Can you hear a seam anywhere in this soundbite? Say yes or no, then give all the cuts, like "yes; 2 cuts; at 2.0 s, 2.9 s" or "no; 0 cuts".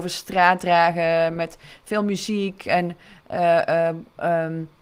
no; 0 cuts